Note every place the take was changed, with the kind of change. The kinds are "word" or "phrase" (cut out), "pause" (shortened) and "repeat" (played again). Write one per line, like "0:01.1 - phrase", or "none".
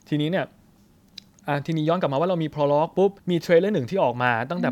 0:03.2 - pause